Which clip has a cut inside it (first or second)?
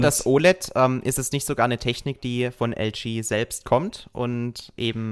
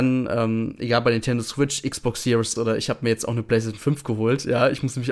second